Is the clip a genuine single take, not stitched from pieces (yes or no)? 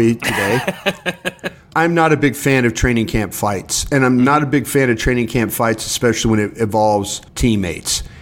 no